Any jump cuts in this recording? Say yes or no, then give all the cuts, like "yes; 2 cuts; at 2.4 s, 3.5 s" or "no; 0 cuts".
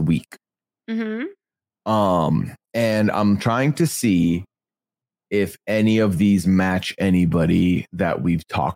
no; 0 cuts